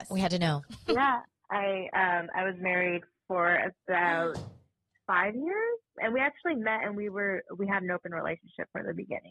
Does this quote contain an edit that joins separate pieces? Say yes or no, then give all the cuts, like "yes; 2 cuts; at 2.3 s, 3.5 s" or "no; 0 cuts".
yes; 1 cut; at 6.0 s